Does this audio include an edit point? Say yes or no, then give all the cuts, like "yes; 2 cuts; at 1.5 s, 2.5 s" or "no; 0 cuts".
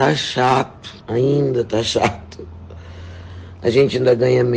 yes; 1 cut; at 1.0 s